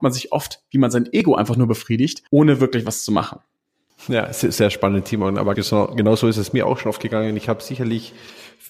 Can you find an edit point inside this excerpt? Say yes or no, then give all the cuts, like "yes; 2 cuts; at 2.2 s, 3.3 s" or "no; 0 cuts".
yes; 2 cuts; at 2.3 s, 5.5 s